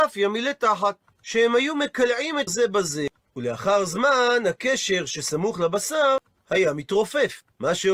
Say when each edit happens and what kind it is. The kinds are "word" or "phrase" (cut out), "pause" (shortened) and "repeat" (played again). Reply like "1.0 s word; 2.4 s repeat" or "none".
2.5 s word